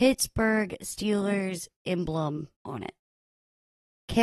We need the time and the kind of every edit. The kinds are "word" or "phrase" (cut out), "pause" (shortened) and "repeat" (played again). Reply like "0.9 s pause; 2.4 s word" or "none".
2.5 s pause